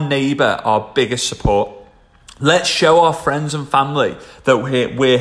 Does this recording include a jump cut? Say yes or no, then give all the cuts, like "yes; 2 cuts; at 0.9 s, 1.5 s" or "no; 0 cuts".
no; 0 cuts